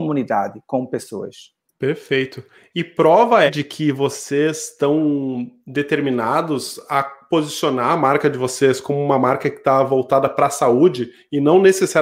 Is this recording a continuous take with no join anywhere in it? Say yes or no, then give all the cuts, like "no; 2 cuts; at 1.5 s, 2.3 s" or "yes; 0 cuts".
no; 1 cut; at 3.5 s